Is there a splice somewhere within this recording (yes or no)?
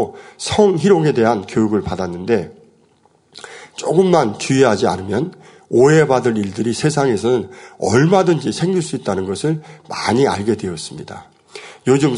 no